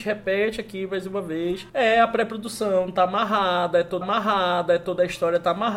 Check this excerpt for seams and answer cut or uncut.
cut